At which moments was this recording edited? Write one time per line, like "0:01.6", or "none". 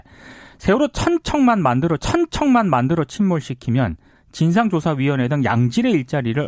0:02.0